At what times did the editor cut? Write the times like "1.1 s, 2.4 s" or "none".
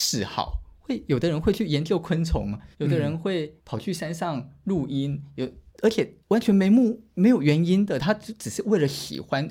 2.7 s, 3.6 s, 5.7 s, 6.2 s